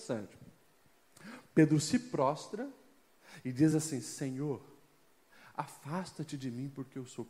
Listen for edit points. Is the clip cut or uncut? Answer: uncut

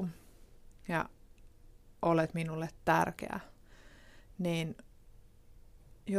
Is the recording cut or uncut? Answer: uncut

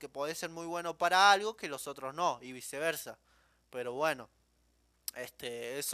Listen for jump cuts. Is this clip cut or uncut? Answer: uncut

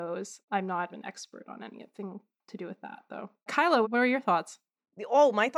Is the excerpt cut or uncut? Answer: cut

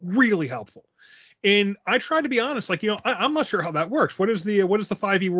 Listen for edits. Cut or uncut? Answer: uncut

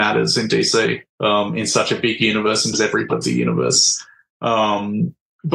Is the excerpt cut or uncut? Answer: cut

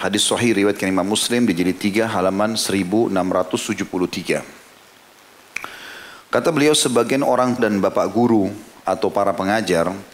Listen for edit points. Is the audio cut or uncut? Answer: cut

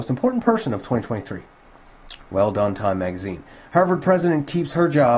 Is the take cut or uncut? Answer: uncut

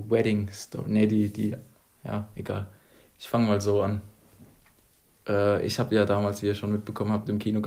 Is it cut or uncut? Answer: uncut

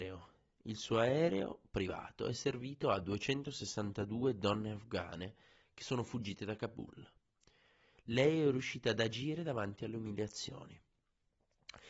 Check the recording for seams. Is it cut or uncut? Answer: uncut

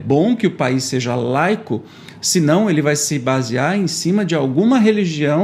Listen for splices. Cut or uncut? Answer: uncut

